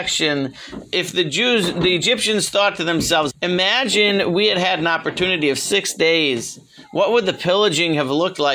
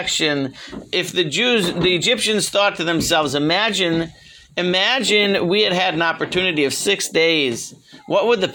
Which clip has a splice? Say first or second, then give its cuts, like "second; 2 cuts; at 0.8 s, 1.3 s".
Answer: first; 1 cut; at 3.3 s